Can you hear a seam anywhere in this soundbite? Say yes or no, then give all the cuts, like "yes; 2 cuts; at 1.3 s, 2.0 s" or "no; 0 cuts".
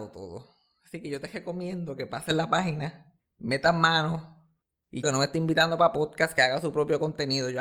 yes; 1 cut; at 5.0 s